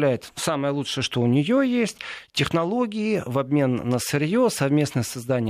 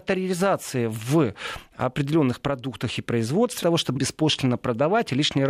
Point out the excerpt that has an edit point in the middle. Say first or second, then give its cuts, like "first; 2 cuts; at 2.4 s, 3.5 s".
second; 2 cuts; at 3.6 s, 3.9 s